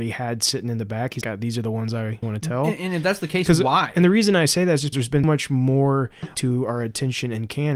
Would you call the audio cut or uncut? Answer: cut